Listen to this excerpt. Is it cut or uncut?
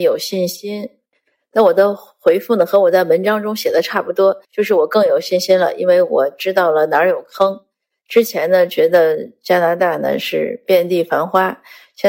cut